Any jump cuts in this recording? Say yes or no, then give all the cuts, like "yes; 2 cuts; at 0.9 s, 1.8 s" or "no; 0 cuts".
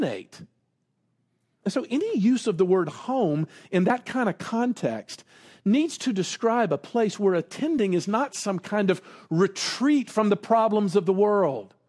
no; 0 cuts